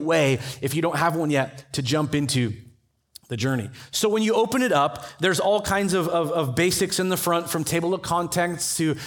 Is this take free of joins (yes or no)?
yes